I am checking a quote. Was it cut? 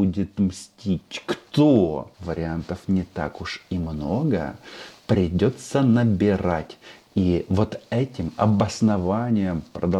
yes; 1 cut; at 2.1 s

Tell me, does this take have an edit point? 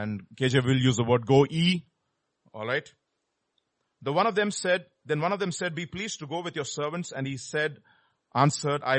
no; 0 cuts

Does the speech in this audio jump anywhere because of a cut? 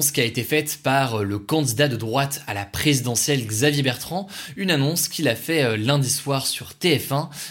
no; 0 cuts

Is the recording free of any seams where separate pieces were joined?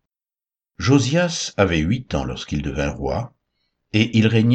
yes; 0 cuts

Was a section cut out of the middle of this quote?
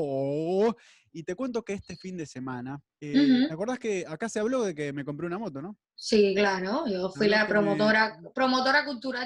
yes; 2 cuts; at 2.9 s, 5.8 s

